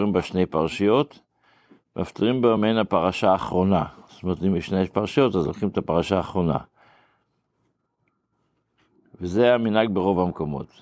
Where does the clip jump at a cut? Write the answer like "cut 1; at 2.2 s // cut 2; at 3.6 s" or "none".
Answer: none